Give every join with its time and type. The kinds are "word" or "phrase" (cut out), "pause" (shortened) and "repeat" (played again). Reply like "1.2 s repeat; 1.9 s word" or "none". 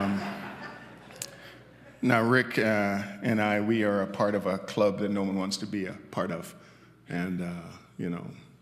none